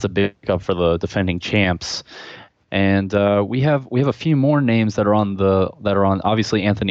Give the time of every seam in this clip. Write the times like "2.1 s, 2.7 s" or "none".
none